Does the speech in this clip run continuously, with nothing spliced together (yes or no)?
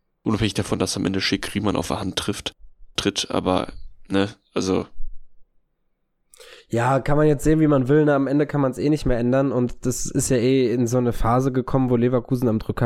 yes